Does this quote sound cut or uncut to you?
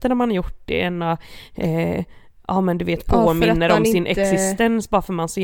uncut